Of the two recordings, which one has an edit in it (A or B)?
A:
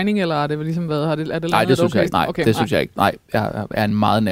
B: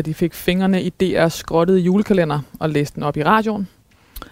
A